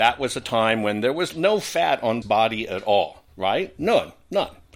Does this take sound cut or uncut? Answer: cut